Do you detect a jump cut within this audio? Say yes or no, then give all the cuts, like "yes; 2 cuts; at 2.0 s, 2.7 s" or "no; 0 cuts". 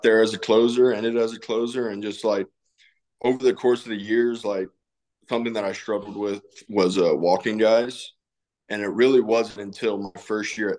no; 0 cuts